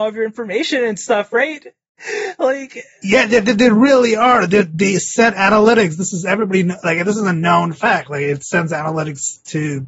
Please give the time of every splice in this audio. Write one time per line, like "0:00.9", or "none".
0:02.9